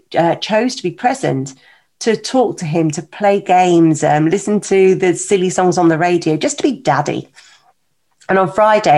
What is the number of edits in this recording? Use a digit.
0